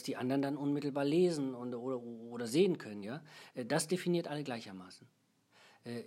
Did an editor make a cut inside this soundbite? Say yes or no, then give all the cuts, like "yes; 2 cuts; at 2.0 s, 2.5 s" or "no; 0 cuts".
no; 0 cuts